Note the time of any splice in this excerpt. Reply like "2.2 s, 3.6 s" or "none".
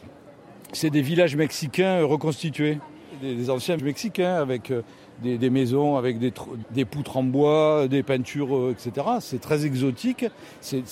3.8 s, 5.4 s, 6.6 s